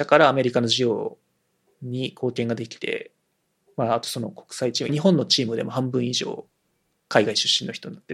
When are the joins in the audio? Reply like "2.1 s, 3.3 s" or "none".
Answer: 4.9 s